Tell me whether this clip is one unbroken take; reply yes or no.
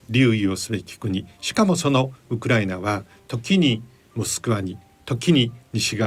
yes